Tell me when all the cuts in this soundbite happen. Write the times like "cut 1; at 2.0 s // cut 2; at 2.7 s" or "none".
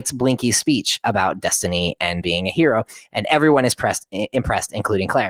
cut 1; at 2.2 s